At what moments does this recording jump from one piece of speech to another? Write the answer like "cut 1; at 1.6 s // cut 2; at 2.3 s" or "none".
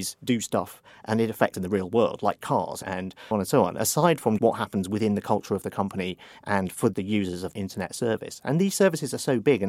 cut 1; at 1.5 s // cut 2; at 2.8 s // cut 3; at 3.3 s // cut 4; at 4.4 s // cut 5; at 6.9 s // cut 6; at 7.5 s